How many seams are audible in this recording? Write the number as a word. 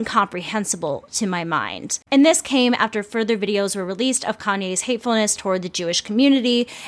one